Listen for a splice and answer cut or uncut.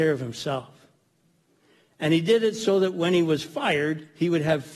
uncut